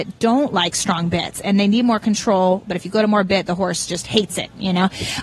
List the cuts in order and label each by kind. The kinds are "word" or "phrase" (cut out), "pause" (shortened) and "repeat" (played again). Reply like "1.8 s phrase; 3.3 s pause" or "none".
none